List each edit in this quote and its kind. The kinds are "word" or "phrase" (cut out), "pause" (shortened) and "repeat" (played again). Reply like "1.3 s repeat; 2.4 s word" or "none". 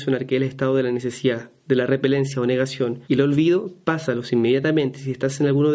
3.0 s pause